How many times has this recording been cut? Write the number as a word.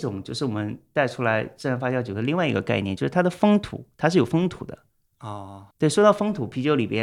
one